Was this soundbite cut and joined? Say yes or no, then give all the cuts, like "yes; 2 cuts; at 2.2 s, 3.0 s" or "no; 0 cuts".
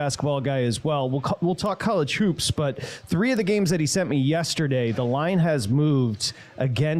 no; 0 cuts